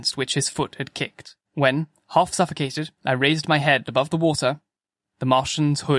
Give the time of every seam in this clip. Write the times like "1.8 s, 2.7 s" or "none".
1.4 s, 3.0 s